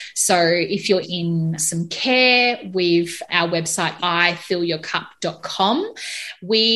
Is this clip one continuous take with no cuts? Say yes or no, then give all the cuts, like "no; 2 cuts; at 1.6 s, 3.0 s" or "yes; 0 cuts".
no; 4 cuts; at 1.0 s, 1.6 s, 3.3 s, 4.0 s